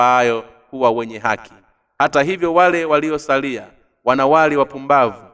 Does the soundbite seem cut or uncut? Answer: uncut